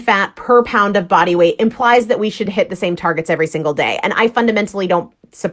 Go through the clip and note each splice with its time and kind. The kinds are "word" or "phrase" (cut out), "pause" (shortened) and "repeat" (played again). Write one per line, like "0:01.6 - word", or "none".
none